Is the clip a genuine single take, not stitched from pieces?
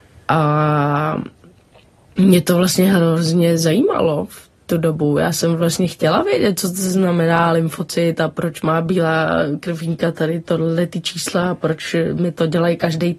yes; 0 cuts

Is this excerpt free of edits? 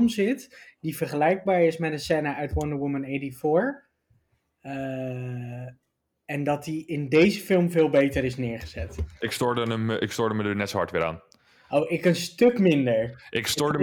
yes; 0 cuts

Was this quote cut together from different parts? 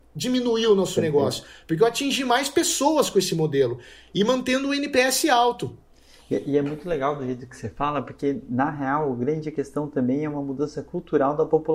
no; 0 cuts

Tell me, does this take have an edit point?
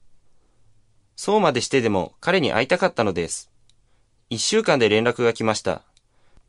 no; 0 cuts

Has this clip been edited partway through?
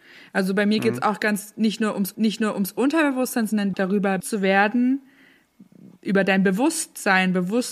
yes; 4 cuts; at 2.1 s, 3.7 s, 4.2 s, 6.0 s

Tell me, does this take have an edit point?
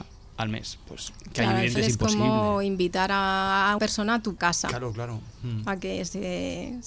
yes; 3 cuts; at 1.8 s, 3.8 s, 4.4 s

